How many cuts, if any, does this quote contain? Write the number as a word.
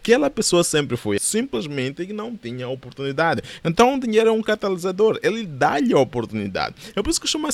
one